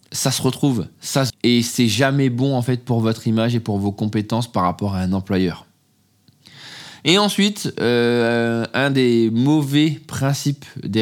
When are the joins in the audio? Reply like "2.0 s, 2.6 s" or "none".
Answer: 1.3 s